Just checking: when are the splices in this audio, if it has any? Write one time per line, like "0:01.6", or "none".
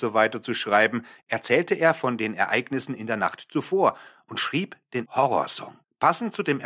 0:05.1